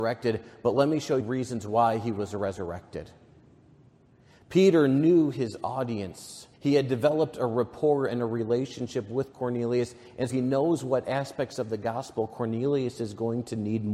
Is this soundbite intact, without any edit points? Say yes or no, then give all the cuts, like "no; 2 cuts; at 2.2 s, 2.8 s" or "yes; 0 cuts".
no; 3 cuts; at 1.2 s, 6.5 s, 10.3 s